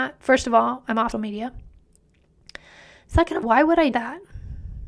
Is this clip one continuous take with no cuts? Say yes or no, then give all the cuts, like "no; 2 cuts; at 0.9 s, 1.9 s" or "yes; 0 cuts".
no; 3 cuts; at 1.1 s, 3.4 s, 3.9 s